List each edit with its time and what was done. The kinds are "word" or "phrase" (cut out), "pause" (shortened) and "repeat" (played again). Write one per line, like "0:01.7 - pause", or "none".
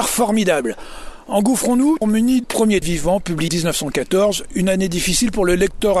0:02.0 - word
0:02.4 - phrase
0:02.8 - phrase
0:03.5 - word